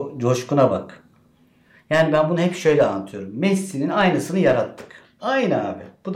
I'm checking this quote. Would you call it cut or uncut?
uncut